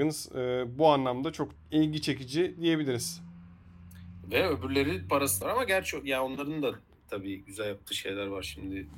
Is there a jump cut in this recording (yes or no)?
yes